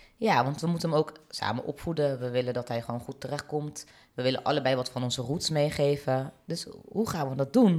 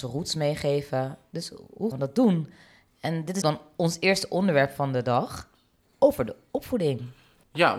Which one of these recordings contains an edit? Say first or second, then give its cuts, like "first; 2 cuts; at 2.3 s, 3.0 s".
second; 2 cuts; at 1.9 s, 3.4 s